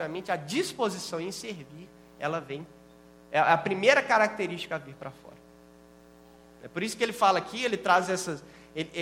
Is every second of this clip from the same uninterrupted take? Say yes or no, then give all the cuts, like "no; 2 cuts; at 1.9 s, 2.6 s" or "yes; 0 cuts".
yes; 0 cuts